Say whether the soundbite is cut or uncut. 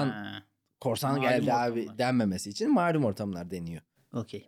uncut